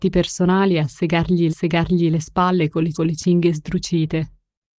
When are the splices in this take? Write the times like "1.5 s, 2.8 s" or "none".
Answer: 1.5 s, 2.9 s